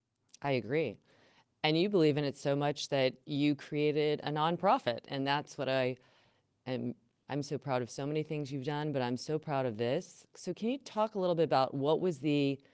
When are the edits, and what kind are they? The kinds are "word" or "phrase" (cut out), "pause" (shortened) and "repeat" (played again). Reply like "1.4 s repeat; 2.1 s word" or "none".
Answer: none